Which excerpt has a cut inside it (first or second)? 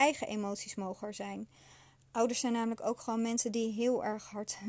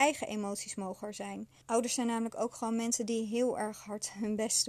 second